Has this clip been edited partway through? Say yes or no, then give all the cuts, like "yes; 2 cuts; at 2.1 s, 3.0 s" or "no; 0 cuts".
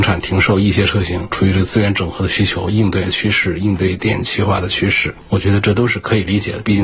yes; 1 cut; at 3.0 s